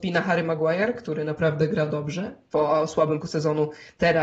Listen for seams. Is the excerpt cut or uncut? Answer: cut